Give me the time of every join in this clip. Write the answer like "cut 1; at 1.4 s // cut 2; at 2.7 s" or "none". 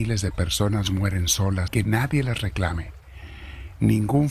cut 1; at 1.7 s